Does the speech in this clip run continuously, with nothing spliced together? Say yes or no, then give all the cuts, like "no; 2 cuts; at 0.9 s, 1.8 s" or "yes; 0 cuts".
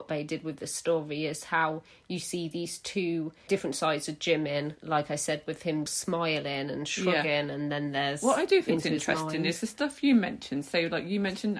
yes; 0 cuts